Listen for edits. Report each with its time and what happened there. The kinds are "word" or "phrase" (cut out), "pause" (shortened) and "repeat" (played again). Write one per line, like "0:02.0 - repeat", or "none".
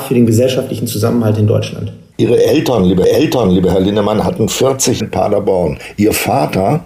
0:03.0 - repeat
0:05.0 - phrase